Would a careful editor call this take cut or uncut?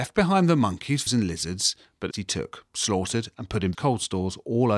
cut